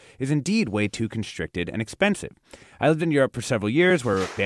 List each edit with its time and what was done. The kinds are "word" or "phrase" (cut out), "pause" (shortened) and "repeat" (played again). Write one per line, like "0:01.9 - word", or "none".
none